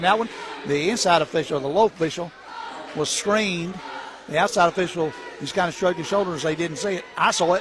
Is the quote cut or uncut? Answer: uncut